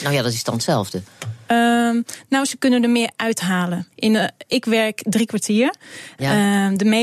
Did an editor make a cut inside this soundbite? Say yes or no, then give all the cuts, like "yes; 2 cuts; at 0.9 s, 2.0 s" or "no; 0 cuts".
yes; 1 cut; at 3.9 s